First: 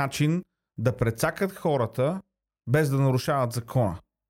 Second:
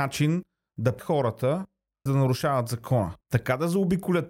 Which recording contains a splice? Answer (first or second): second